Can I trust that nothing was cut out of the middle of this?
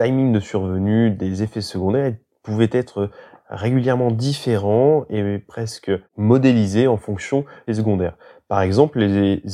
no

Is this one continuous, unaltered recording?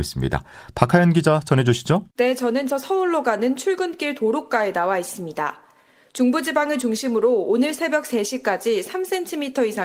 no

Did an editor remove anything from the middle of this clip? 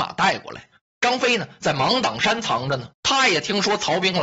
yes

